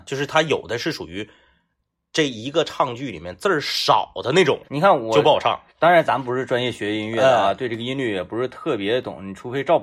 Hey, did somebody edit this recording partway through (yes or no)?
yes